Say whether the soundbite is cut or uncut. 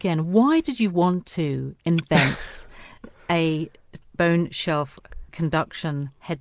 uncut